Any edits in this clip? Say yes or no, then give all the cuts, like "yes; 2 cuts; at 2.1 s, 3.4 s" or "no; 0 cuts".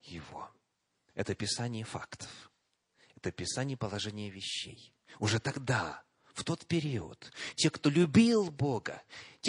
no; 0 cuts